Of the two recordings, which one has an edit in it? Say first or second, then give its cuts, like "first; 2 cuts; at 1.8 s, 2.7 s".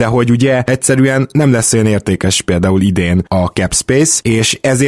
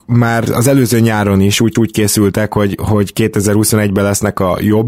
second; 1 cut; at 1.8 s